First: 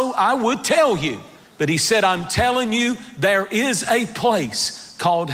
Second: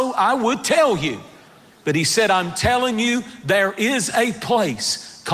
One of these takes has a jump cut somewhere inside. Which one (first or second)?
first